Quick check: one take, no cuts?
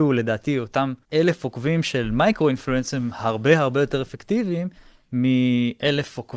no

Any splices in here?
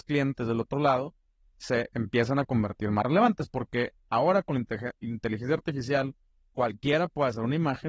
no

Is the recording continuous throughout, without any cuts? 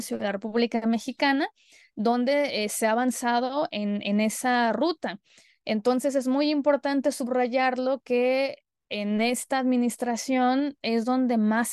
yes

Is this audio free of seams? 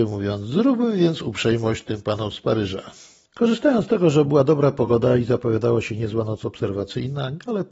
yes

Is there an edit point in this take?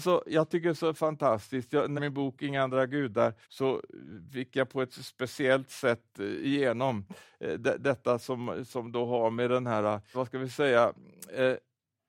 yes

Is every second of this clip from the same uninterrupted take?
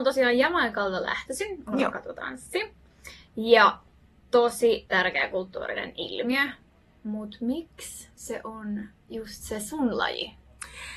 yes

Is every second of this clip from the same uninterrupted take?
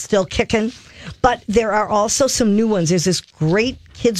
yes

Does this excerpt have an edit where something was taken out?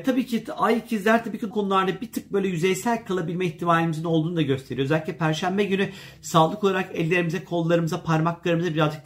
yes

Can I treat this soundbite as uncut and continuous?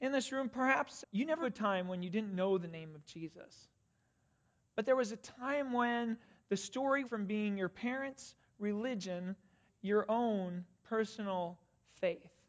no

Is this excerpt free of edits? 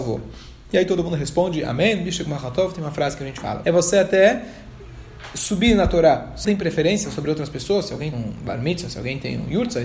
no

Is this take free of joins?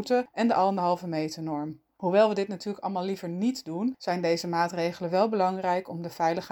yes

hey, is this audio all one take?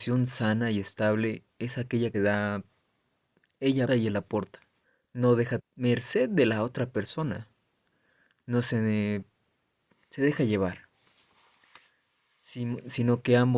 no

